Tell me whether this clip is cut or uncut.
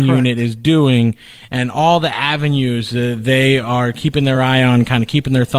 uncut